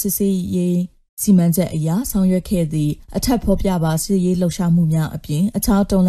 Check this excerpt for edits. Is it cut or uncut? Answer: cut